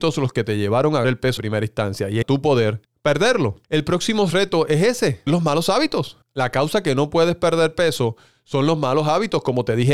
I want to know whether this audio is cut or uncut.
cut